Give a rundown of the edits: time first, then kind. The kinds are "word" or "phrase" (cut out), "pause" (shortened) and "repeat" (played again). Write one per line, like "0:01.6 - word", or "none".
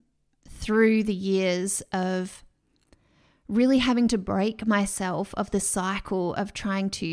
none

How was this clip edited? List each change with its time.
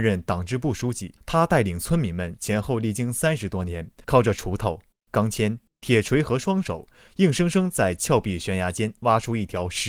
0:01.2 - pause
0:04.0 - pause

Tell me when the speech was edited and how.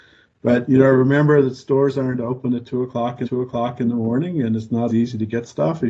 0:03.2 - repeat
0:04.9 - word

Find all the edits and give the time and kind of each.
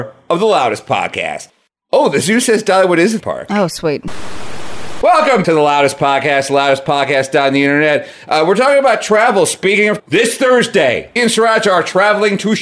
0:03.2 - word
0:05.4 - word
0:10.0 - word
0:11.2 - word

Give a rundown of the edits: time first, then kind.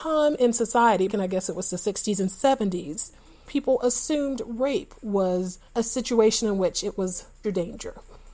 0:01.1 - word
0:03.5 - word
0:05.7 - pause
0:07.4 - word

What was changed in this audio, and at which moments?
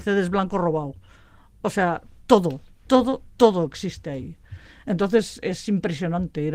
none

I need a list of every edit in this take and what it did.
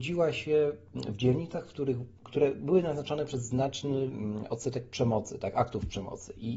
0:02.2 - pause

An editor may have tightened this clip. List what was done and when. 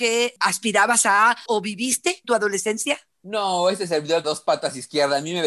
0:01.5 - word
0:02.2 - word
0:04.2 - word

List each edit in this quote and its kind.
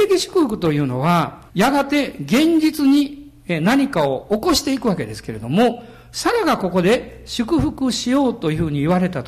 0:01.5 - pause

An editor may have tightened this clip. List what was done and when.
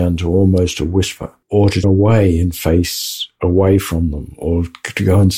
0:01.4 - pause
0:01.8 - word

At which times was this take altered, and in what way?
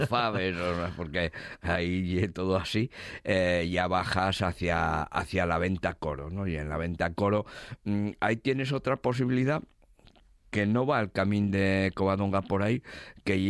none

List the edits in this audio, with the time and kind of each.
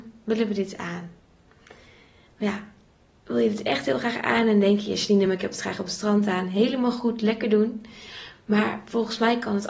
none

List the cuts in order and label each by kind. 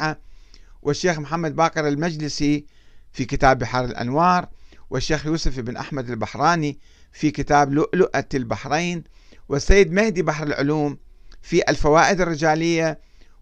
none

